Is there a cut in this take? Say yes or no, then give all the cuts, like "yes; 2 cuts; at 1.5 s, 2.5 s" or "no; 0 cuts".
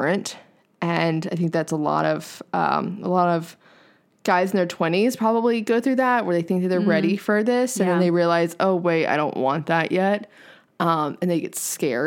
no; 0 cuts